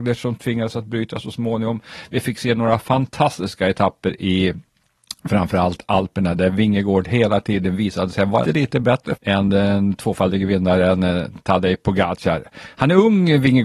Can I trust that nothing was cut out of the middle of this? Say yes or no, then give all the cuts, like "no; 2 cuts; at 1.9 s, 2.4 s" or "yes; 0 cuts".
no; 2 cuts; at 8.4 s, 9.2 s